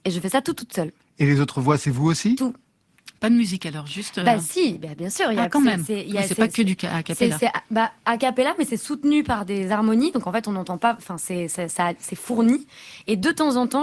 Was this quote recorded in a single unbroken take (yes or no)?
yes